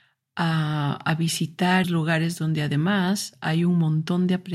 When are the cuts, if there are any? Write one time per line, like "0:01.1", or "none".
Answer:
0:01.8